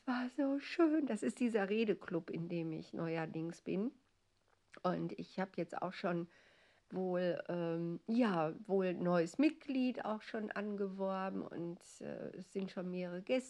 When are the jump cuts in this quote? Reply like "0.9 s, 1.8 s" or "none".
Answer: none

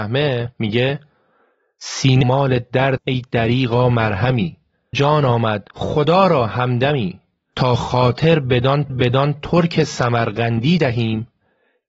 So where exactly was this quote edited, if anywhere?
2.2 s, 3.0 s, 4.9 s, 5.7 s, 7.5 s, 8.9 s

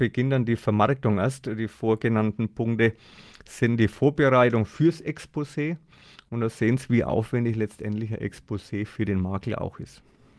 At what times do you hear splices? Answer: none

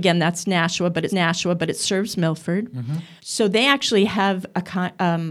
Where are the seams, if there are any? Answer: 1.1 s, 3.2 s

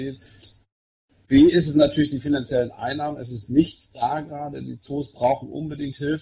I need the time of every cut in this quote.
none

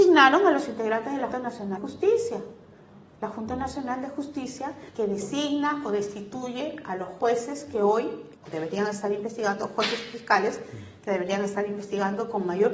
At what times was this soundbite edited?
1.3 s, 1.8 s, 4.9 s, 8.3 s

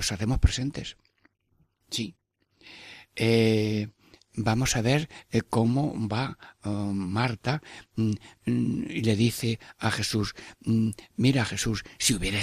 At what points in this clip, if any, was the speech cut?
none

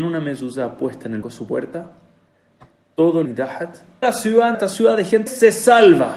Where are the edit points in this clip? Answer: 1.2 s, 3.2 s, 4.0 s, 4.5 s, 5.3 s

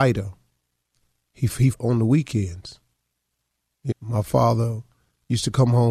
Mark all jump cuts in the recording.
1.7 s, 3.9 s

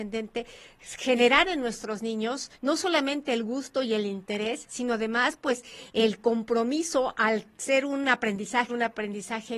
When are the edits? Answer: 2.5 s, 8.7 s

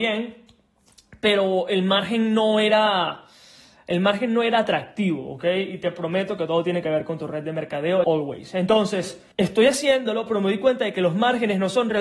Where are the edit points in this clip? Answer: 8.0 s, 9.3 s

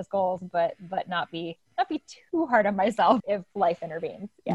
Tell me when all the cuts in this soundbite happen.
3.2 s

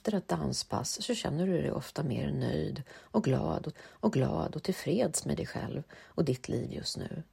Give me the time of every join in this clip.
3.7 s

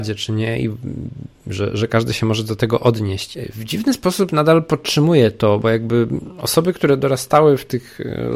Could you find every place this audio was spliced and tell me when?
5.6 s

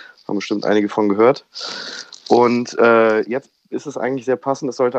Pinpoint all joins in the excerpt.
none

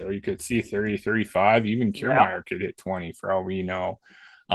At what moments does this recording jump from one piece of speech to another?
none

